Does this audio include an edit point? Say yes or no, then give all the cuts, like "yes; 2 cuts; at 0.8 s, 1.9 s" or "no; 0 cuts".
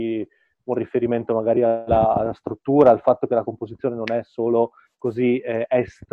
no; 0 cuts